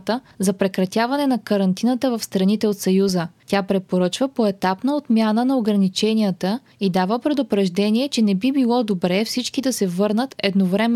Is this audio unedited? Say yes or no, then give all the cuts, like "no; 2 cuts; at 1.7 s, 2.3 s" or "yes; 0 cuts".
yes; 0 cuts